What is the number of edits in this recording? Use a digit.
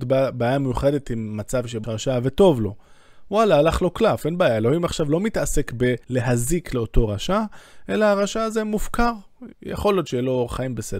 3